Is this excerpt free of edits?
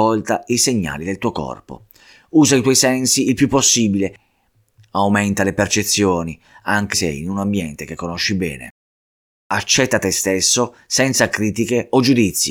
no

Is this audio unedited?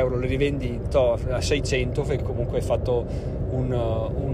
no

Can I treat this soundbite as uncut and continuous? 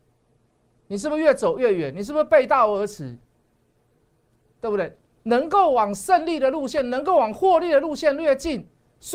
yes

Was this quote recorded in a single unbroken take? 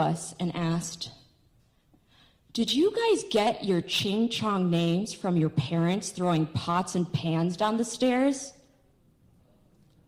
yes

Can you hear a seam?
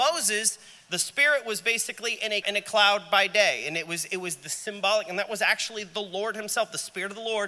yes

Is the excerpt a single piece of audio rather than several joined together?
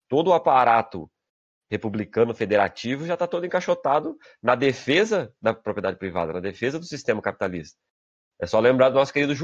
yes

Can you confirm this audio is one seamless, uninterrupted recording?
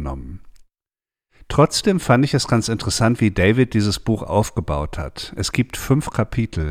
yes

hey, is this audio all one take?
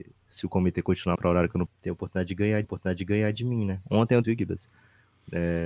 no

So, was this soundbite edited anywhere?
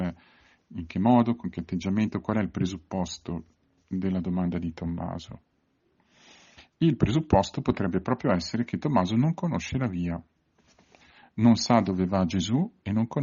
no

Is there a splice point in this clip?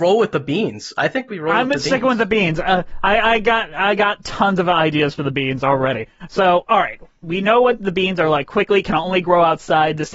no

